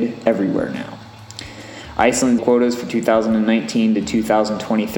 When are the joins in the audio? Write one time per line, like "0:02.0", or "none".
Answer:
0:02.4